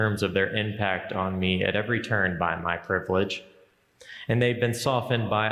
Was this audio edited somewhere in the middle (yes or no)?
no